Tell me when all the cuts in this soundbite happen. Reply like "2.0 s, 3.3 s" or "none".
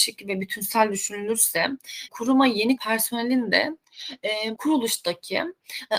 2.1 s, 2.8 s, 4.6 s